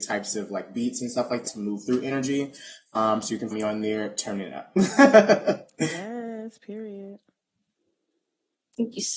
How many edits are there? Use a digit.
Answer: 2